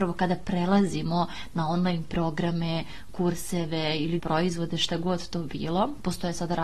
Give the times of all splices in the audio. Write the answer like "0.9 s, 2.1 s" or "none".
4.2 s